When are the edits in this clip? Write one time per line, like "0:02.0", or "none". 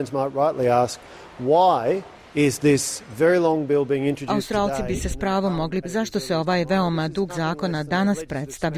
0:05.8
0:07.3

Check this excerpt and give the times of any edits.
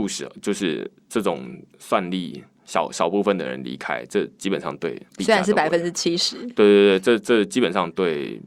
0:05.1

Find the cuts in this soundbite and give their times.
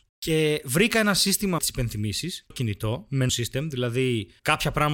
0:01.6
0:02.5
0:03.3

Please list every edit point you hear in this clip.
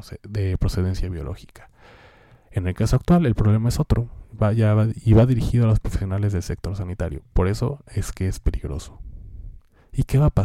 none

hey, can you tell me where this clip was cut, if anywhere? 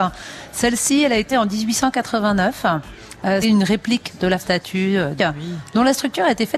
0:01.3
0:03.4
0:04.4
0:05.2

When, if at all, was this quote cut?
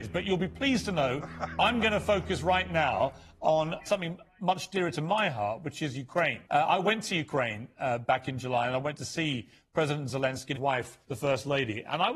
0:03.9
0:06.5
0:10.6
0:11.0

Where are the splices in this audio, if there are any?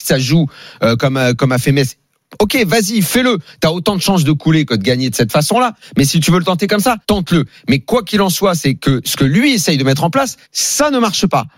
0:01.0
0:07.0
0:10.4

